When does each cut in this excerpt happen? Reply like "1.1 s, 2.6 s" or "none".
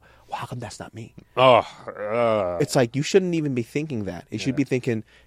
none